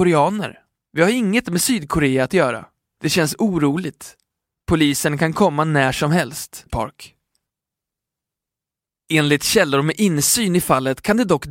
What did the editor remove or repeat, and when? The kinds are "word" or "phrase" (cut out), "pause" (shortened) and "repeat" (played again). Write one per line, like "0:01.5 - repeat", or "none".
0:06.7 - word